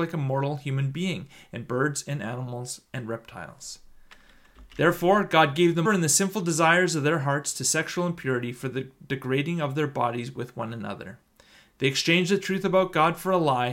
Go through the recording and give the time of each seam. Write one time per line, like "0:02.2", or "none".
0:05.8